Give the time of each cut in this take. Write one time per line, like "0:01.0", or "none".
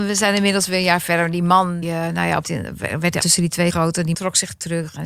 0:01.8
0:02.4
0:03.2
0:03.7
0:04.1